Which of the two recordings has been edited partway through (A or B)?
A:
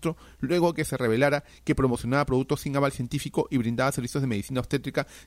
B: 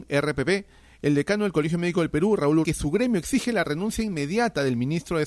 B